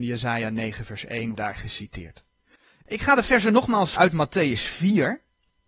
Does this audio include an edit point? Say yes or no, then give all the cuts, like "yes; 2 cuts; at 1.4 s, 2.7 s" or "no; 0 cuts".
yes; 2 cuts; at 1.3 s, 4.0 s